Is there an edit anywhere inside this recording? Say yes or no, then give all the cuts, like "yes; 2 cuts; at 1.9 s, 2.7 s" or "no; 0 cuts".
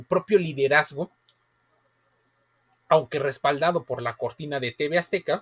no; 0 cuts